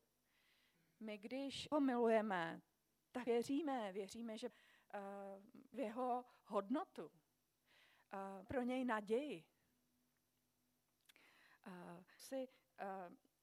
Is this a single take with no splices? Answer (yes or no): no